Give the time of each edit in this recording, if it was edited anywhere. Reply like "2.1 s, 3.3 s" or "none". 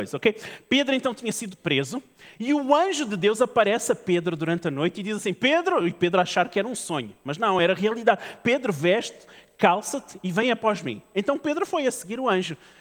none

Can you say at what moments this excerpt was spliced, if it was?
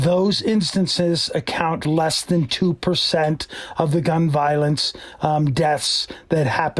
1.8 s

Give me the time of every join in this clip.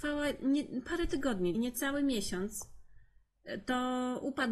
1.5 s

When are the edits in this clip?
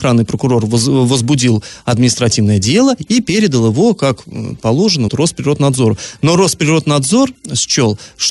5.1 s

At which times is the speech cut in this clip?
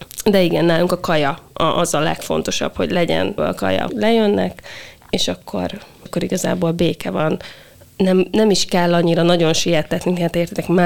3.4 s, 3.9 s, 6.1 s

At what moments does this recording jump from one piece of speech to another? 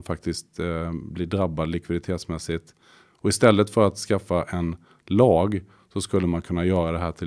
none

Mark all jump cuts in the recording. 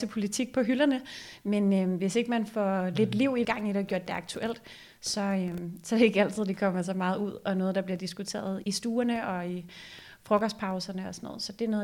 3.4 s, 8.6 s

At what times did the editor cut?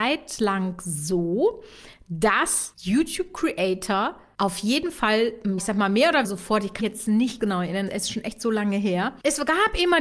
5.6 s, 6.2 s, 6.8 s, 7.4 s, 7.9 s

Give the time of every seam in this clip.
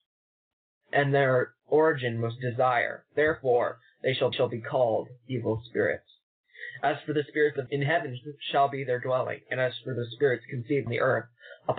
4.3 s, 7.7 s, 10.9 s

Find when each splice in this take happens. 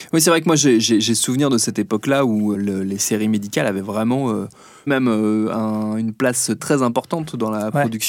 2.5 s, 4.9 s, 6.6 s

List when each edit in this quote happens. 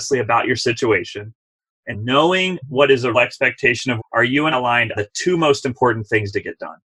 1.9 s, 3.1 s, 4.0 s, 4.5 s, 4.9 s

